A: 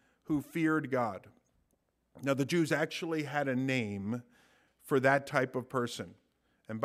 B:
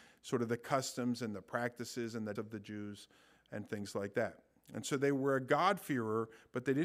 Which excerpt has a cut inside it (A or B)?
B